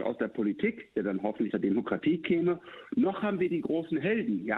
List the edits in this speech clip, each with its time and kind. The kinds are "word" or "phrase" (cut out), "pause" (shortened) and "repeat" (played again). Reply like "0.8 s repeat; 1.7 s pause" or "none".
1.5 s word